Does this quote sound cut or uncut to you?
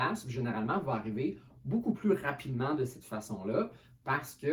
uncut